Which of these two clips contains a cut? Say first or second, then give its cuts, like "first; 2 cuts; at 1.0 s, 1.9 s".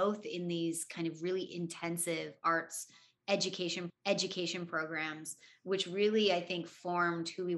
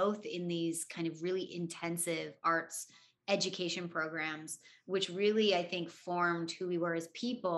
first; 1 cut; at 3.9 s